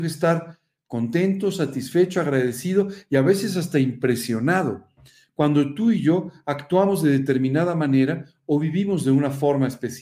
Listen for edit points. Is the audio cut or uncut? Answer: uncut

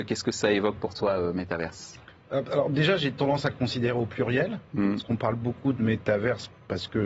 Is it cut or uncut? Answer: uncut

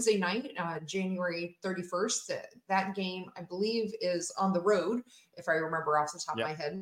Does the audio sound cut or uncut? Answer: uncut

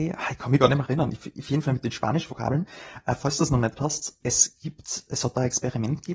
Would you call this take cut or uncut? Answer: cut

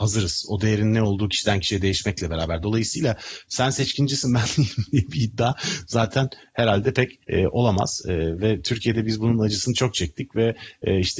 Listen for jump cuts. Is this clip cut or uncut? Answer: cut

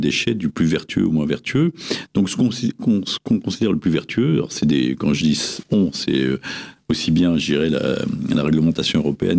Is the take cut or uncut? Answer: uncut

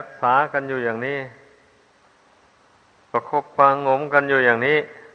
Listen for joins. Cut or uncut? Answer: uncut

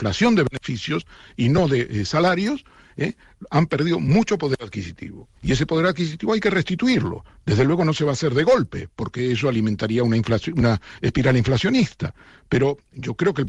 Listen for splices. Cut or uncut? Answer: cut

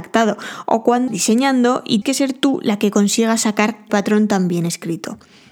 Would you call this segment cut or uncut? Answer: cut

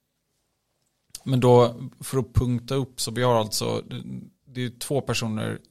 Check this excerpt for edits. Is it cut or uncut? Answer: uncut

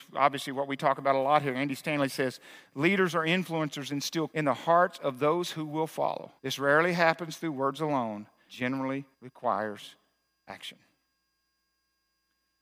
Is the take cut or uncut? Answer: cut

